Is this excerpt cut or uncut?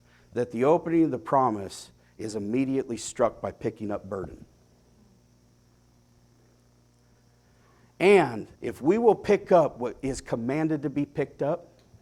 cut